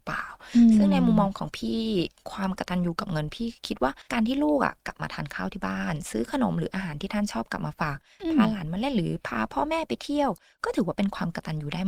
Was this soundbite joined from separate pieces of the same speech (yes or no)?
yes